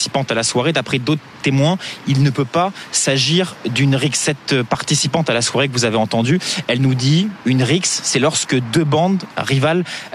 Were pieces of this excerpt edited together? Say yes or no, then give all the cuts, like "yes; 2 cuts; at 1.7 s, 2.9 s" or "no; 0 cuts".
no; 0 cuts